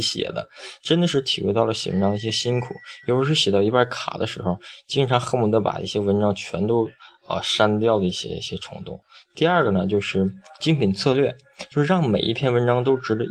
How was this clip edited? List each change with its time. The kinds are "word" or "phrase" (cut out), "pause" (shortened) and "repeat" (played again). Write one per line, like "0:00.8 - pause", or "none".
none

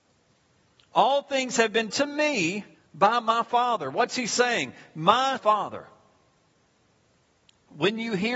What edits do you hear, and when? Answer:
0:01.9 - word
0:02.7 - pause
0:05.4 - phrase

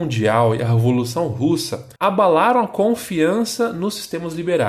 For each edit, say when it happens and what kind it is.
0:02.0 - pause

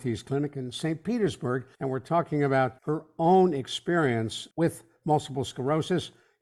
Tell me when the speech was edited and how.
0:01.7 - pause
0:02.8 - pause
0:04.5 - pause

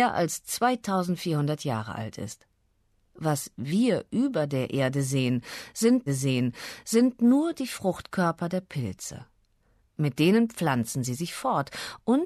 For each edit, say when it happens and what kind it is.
0:06.1 - repeat

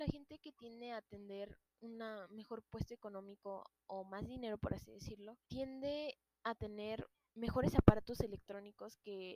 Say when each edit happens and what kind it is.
0:05.4 - pause
0:07.1 - pause

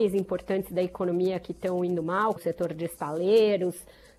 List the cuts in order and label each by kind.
0:02.4 - word

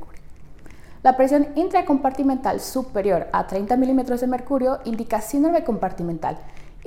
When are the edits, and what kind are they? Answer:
none

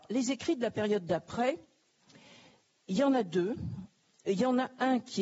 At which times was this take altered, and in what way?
none

